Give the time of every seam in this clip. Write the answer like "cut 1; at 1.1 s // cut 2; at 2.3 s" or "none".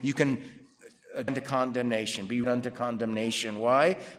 cut 1; at 1.3 s // cut 2; at 2.4 s